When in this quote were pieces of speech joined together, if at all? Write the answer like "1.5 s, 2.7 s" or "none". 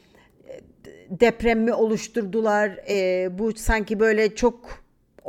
none